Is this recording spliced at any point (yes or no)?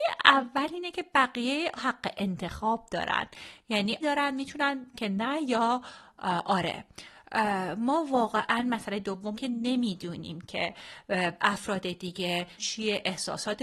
yes